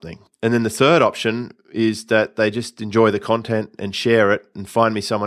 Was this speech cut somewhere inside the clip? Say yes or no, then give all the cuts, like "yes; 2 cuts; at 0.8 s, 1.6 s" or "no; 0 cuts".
no; 0 cuts